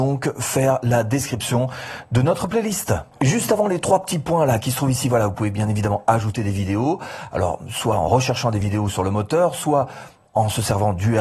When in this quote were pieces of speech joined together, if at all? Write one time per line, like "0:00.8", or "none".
none